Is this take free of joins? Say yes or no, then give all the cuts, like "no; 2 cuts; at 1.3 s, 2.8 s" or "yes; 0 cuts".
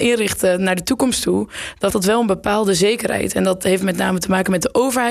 no; 1 cut; at 1.9 s